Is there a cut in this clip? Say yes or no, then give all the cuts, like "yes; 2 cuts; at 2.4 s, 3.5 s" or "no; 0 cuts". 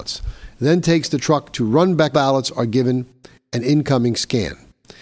yes; 1 cut; at 2.1 s